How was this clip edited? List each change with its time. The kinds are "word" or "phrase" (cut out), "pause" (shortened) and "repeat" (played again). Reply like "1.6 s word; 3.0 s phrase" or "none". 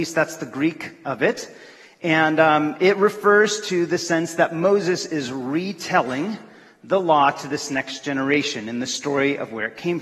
none